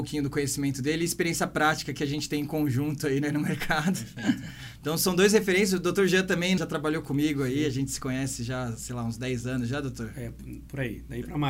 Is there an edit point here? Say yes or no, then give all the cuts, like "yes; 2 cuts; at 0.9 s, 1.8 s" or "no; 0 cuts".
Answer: yes; 1 cut; at 6.6 s